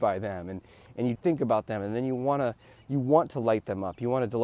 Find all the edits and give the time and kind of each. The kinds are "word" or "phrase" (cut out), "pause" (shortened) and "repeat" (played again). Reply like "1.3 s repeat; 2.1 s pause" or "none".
1.2 s word